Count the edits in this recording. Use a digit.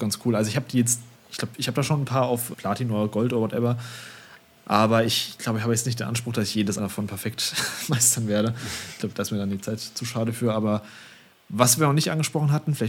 1